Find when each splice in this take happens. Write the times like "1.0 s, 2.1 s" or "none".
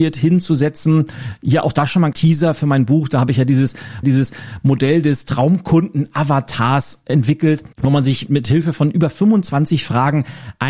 2.1 s, 4.0 s, 7.7 s, 8.3 s